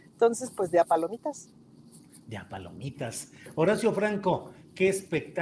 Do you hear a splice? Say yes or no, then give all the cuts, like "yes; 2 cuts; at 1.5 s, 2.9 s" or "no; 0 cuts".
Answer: no; 0 cuts